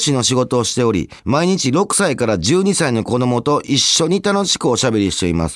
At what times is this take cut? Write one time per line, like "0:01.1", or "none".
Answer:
0:01.2